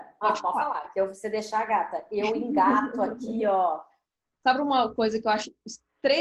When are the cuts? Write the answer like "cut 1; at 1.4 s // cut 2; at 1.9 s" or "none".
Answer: none